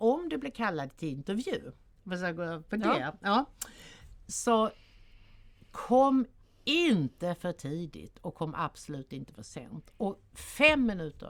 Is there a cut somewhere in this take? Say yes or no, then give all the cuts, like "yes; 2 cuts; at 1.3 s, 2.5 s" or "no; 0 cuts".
no; 0 cuts